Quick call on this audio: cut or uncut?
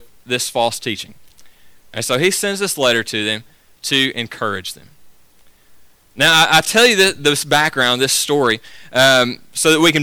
uncut